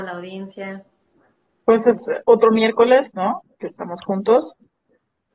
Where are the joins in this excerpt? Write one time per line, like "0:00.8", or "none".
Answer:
none